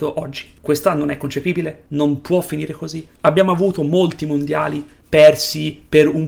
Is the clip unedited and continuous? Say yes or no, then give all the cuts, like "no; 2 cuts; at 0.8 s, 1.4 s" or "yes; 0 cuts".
yes; 0 cuts